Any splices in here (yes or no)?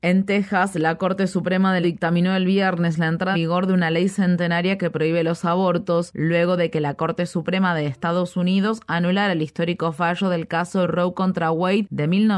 yes